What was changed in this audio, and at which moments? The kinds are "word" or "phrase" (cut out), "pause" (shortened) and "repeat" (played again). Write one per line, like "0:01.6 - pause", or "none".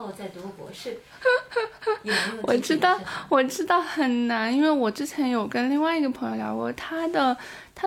none